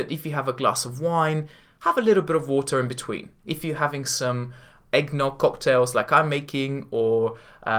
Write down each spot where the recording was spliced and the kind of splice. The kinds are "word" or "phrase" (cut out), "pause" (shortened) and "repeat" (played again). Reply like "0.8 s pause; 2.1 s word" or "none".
none